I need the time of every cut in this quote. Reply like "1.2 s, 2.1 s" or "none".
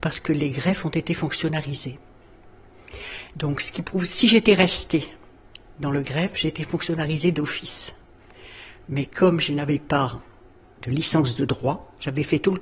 none

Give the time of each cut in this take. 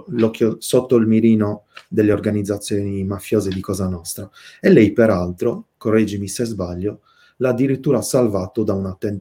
none

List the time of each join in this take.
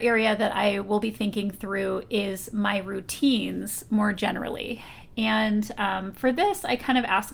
none

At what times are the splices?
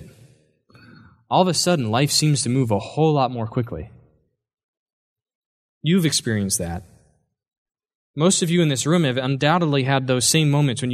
none

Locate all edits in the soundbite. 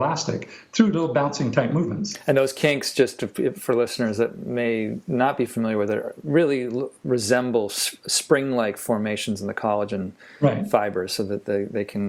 none

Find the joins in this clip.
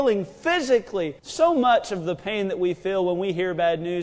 1.2 s

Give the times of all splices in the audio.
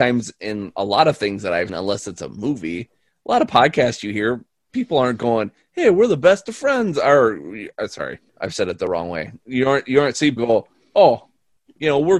1.7 s, 8.3 s, 10.4 s

